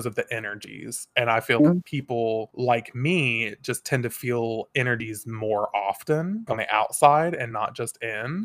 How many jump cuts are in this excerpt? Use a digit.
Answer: 2